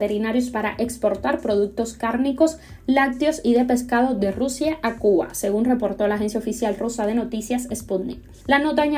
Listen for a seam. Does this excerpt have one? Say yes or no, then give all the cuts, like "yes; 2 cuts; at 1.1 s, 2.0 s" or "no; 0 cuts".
no; 0 cuts